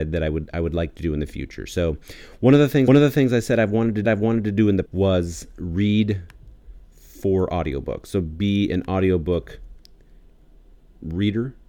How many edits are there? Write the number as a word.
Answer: four